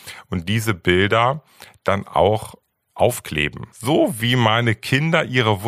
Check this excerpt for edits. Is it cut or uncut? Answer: cut